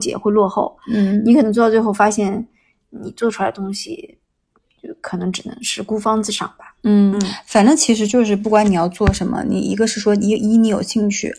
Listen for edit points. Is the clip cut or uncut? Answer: uncut